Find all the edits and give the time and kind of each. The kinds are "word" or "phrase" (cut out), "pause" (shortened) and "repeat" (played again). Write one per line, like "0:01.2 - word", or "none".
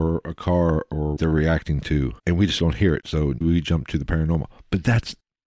0:01.2 - phrase
0:02.2 - pause
0:03.4 - word